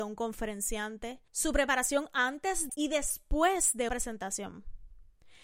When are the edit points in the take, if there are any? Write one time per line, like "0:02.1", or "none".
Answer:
0:01.3
0:02.7
0:03.9